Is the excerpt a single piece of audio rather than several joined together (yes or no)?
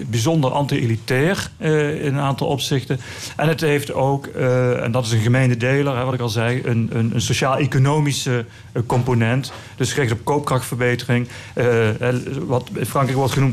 yes